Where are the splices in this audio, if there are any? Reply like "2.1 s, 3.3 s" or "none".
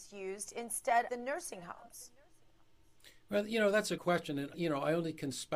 1.1 s, 4.0 s, 4.5 s